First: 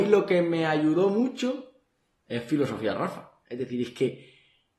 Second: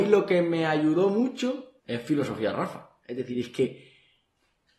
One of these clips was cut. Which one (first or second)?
second